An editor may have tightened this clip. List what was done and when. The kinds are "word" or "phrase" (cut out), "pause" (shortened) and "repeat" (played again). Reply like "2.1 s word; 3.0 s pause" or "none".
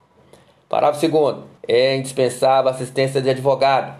1.6 s pause